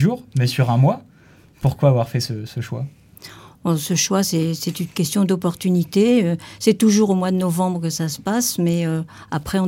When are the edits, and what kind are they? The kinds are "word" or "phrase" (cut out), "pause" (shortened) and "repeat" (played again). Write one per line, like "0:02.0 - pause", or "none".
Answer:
none

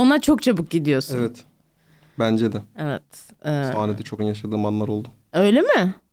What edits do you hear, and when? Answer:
0:04.2 - word

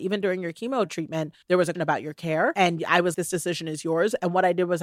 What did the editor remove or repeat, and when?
0:01.4 - pause
0:01.7 - word
0:03.1 - word

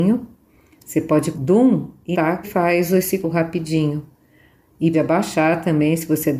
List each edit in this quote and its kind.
0:01.3 - phrase
0:02.1 - word
0:02.4 - word
0:03.2 - word
0:04.9 - word

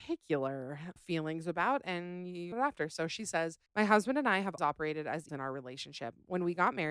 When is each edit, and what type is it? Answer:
0:01.0 - word
0:02.5 - phrase
0:03.7 - pause
0:04.6 - word
0:05.3 - word

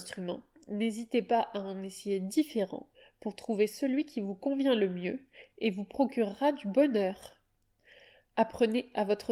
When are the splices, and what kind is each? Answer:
none

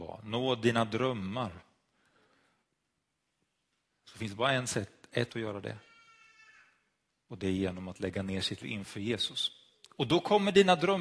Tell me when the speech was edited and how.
0:05.3 - word
0:08.6 - word

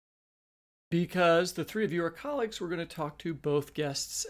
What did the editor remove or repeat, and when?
none

